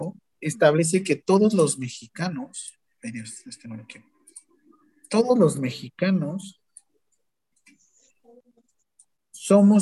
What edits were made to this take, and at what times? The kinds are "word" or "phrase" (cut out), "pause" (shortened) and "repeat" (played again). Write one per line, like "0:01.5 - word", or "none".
none